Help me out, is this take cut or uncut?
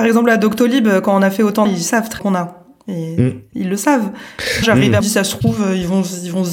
cut